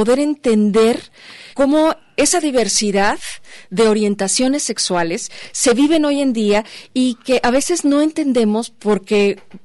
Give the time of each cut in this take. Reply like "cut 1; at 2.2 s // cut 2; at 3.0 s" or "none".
cut 1; at 1.5 s